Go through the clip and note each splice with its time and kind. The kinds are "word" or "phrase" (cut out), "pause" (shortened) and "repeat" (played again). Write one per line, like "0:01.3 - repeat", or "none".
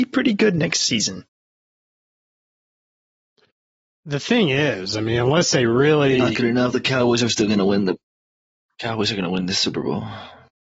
none